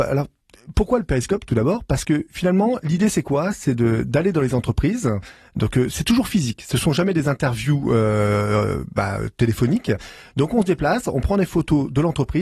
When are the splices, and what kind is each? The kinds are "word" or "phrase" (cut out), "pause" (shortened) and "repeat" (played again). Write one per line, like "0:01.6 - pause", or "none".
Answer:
none